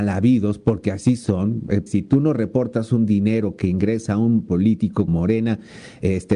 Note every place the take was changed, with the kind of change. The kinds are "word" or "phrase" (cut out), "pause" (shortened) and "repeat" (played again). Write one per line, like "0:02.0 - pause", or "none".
0:01.9 - word
0:04.5 - word
0:05.1 - word